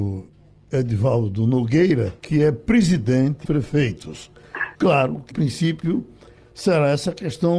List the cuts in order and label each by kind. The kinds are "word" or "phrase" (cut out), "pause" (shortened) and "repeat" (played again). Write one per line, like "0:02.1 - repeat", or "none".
0:02.2 - pause
0:03.4 - phrase
0:04.7 - pause
0:05.3 - phrase